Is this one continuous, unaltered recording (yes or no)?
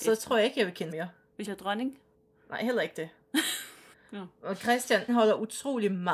no